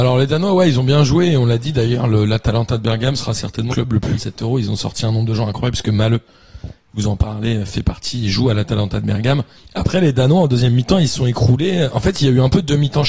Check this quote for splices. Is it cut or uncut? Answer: cut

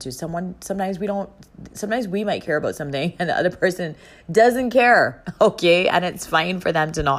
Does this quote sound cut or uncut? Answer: uncut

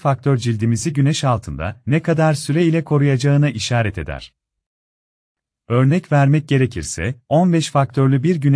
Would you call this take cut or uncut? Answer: uncut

